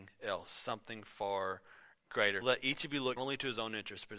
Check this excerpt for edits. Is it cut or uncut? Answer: cut